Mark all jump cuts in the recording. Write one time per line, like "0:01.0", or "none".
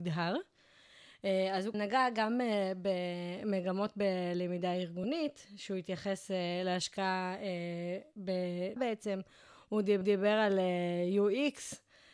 0:01.7
0:08.8
0:10.0